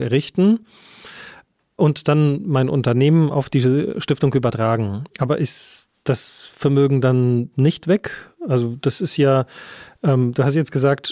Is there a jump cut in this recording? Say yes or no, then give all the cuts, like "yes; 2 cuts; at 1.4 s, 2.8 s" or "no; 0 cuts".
no; 0 cuts